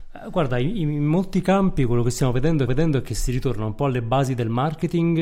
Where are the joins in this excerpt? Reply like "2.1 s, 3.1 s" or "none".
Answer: 2.7 s